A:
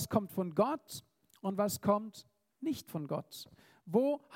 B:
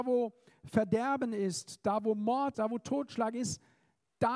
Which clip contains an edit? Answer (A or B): B